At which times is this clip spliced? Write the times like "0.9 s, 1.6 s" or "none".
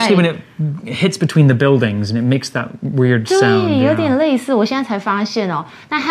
none